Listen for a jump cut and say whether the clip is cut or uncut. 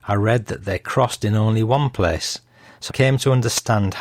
cut